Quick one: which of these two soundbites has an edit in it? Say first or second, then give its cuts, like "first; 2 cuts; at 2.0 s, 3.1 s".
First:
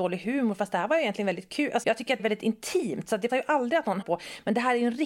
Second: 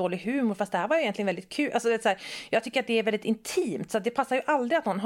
first; 4 cuts; at 1.8 s, 2.2 s, 3.3 s, 4.0 s